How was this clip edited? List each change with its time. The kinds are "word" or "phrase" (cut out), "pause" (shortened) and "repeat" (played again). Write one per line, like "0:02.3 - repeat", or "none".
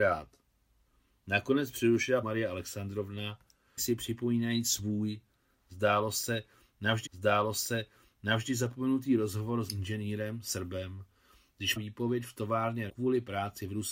0:02.2 - word
0:03.8 - word
0:07.1 - repeat
0:09.7 - word
0:11.8 - word
0:12.9 - word